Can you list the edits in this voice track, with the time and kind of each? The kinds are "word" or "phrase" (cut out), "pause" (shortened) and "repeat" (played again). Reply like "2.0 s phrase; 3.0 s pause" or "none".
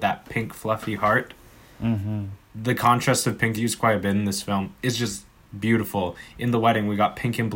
3.5 s phrase